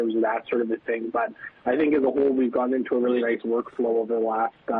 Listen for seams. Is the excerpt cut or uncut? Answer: uncut